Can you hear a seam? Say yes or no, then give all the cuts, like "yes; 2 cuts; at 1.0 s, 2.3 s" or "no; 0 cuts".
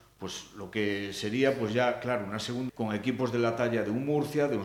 yes; 1 cut; at 2.7 s